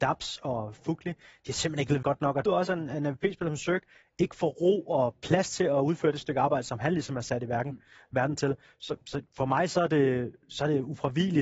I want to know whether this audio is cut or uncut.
cut